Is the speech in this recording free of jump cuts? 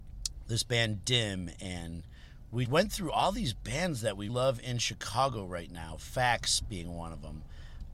no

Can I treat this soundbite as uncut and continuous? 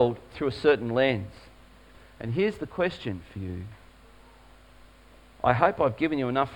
yes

